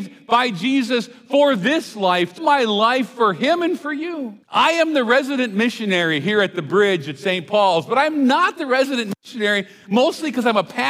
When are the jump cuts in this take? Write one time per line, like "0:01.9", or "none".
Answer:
0:02.4
0:04.4